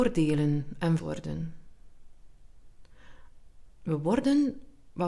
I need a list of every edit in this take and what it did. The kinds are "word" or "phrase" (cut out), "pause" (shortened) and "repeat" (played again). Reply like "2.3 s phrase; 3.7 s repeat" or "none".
1.0 s word